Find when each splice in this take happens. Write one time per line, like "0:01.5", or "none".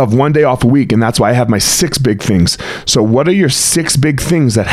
none